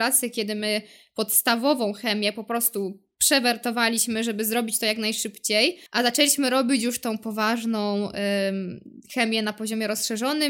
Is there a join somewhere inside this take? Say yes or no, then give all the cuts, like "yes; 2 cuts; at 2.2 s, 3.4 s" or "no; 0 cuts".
yes; 1 cut; at 5.9 s